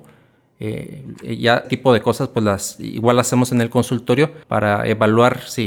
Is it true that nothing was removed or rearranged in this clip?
no; 2 cuts; at 1.6 s, 4.4 s

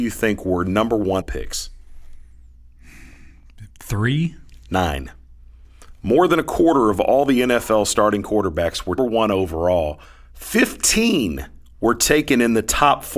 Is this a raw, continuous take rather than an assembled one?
no; 4 cuts; at 1.2 s, 3.7 s, 9.0 s, 10.0 s

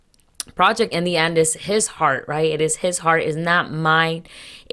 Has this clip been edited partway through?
yes; 1 cut; at 0.9 s

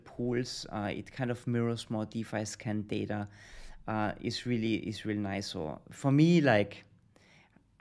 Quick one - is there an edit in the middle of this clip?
no; 0 cuts

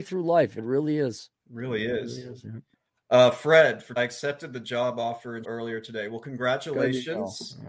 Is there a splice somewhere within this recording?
yes; 4 cuts; at 1.4 s, 2.7 s, 4.0 s, 5.4 s

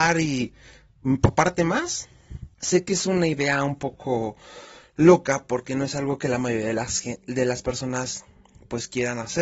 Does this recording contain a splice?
yes; 1 cut; at 2.5 s

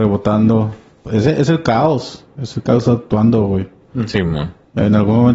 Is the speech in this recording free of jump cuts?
yes; 0 cuts

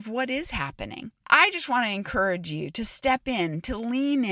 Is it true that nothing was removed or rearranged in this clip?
yes; 0 cuts

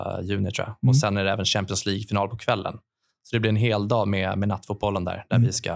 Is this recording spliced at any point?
no; 0 cuts

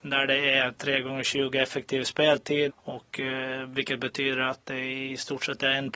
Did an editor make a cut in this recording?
yes; 1 cut; at 2.7 s

